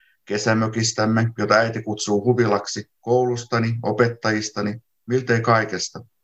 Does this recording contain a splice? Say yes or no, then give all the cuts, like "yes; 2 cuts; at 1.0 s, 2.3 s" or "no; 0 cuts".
no; 0 cuts